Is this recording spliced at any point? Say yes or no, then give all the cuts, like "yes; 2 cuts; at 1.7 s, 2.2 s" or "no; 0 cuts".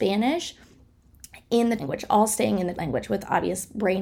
yes; 2 cuts; at 1.8 s, 2.7 s